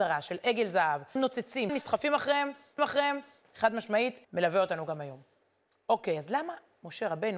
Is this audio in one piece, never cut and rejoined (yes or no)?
no